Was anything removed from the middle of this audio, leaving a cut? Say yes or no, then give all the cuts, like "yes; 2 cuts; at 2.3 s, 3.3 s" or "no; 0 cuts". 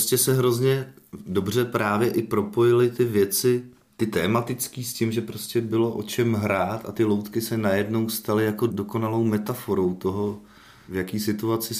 no; 0 cuts